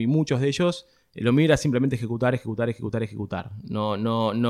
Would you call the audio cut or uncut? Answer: uncut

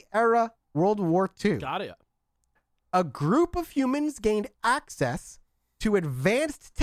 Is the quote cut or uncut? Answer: uncut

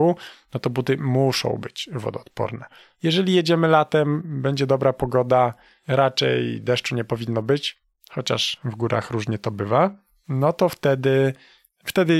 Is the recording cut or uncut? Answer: uncut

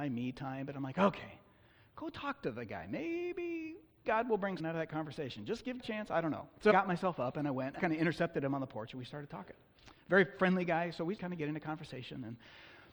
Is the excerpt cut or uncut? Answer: cut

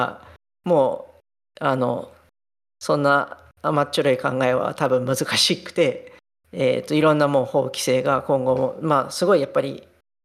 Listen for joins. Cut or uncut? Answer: uncut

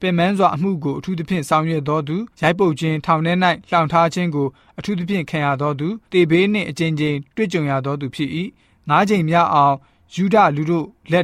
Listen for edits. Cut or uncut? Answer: cut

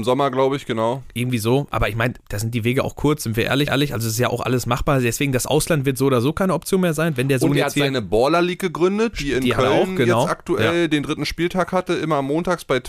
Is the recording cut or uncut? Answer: cut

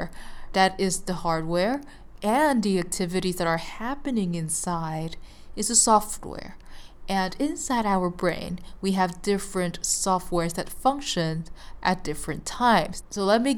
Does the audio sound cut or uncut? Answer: uncut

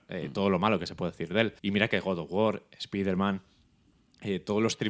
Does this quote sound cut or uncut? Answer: cut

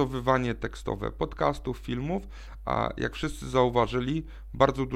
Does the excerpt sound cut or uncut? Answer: uncut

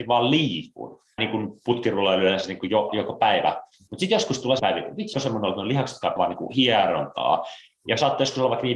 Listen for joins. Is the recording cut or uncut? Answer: cut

